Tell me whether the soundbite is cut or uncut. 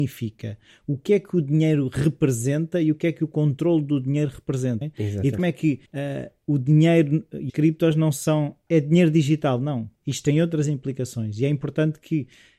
cut